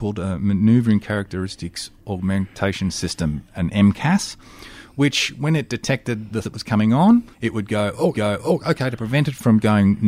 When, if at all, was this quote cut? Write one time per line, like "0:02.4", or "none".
0:06.4
0:07.3
0:08.1